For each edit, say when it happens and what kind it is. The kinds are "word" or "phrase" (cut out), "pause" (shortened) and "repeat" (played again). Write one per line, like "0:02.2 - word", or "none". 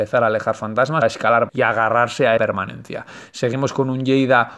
0:01.0 - word
0:01.5 - word
0:02.4 - word

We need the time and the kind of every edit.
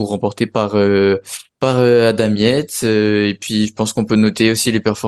0:01.5 - pause

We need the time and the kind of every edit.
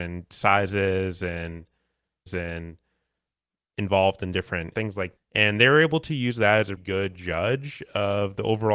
0:02.3 - repeat
0:04.7 - phrase
0:05.2 - word
0:06.8 - word

